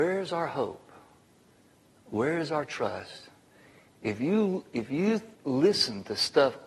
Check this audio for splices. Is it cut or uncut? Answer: cut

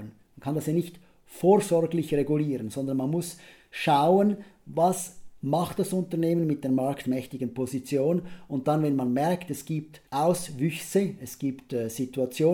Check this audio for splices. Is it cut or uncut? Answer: uncut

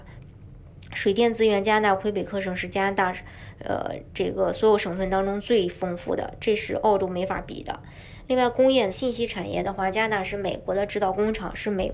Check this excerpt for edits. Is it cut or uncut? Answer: cut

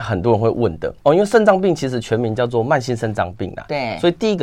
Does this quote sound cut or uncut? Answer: cut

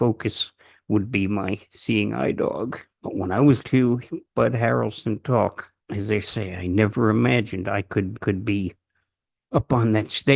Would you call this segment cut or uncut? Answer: cut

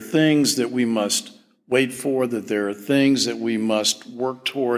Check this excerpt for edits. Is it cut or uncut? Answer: uncut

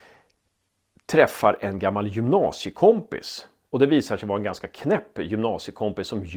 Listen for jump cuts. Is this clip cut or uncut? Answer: uncut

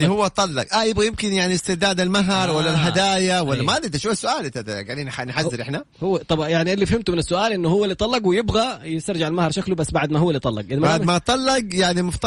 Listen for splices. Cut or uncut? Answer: uncut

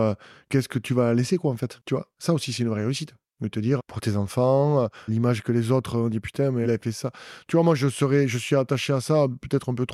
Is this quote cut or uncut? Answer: cut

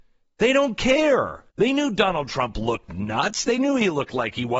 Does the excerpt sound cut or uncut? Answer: cut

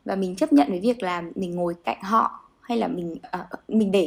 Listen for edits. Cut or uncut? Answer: uncut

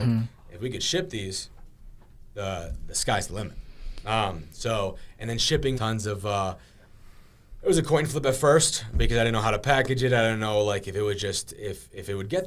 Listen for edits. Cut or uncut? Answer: cut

